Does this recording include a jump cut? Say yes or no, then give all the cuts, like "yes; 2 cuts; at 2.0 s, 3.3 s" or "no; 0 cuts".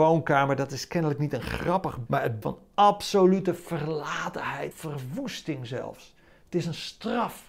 yes; 3 cuts; at 2.1 s, 2.4 s, 4.7 s